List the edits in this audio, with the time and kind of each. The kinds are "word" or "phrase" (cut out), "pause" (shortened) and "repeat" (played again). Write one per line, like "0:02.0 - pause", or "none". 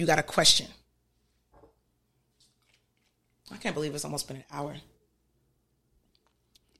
none